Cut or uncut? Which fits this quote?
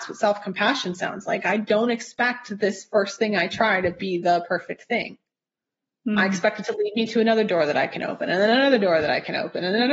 uncut